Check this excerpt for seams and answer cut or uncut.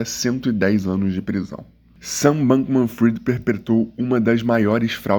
uncut